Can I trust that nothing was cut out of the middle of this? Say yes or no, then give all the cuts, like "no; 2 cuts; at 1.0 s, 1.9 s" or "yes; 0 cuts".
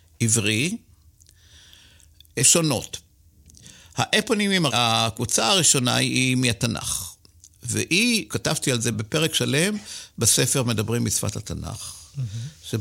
no; 4 cuts; at 2.4 s, 4.7 s, 8.3 s, 8.9 s